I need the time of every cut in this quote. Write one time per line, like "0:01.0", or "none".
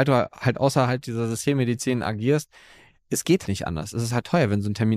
0:03.4